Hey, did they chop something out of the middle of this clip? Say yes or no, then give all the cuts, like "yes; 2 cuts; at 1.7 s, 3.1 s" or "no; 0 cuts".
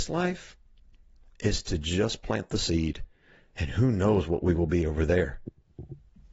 no; 0 cuts